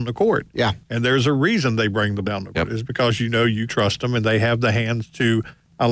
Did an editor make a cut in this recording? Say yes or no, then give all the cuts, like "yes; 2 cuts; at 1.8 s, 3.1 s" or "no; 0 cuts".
yes; 3 cuts; at 2.2 s, 2.5 s, 3.7 s